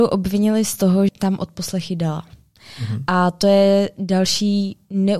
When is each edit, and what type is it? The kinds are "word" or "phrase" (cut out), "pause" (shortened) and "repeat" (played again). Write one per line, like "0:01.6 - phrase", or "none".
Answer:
0:01.1 - word